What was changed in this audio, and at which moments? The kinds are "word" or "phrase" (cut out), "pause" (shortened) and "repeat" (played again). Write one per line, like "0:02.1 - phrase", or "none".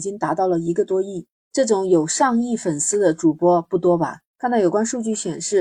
0:01.3 - pause
0:04.3 - pause

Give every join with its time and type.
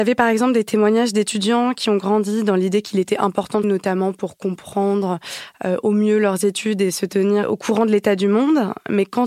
0:03.6 - word

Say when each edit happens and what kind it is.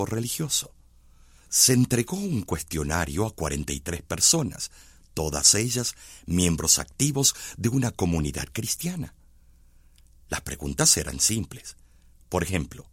none

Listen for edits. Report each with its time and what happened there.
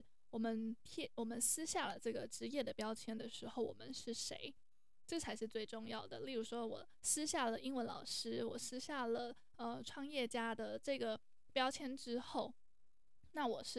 none

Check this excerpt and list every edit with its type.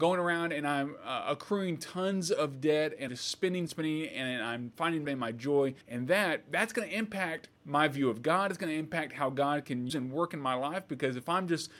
0:03.1 - word
0:03.7 - word
0:05.0 - phrase
0:05.8 - pause
0:07.6 - pause
0:09.9 - word

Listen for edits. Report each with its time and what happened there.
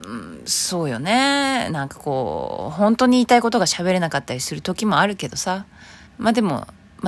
0:06.1 - pause

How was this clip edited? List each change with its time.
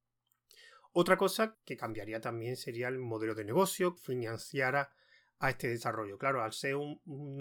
0:01.5 - word
0:04.0 - word

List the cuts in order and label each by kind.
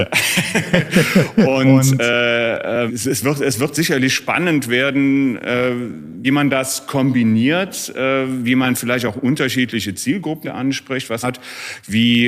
0:02.9 - word
0:06.2 - word
0:10.4 - word
0:11.2 - phrase

